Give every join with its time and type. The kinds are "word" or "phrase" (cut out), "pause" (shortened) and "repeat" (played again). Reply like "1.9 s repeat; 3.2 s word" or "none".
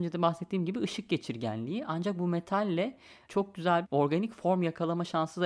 3.8 s word